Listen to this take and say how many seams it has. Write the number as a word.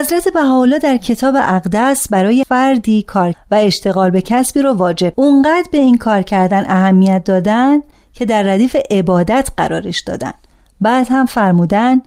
three